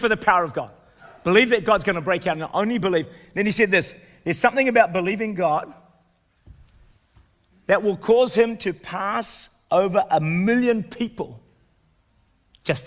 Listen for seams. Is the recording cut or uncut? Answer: uncut